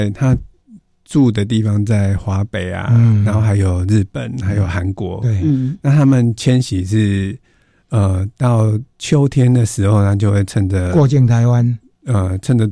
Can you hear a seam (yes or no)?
no